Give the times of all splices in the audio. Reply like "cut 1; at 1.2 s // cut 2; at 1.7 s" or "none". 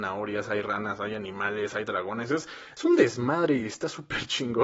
none